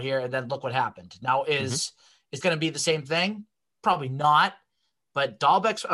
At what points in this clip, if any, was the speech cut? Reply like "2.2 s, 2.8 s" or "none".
2.4 s